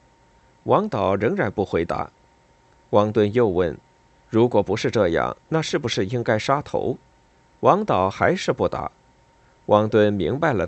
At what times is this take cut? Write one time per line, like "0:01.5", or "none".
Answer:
none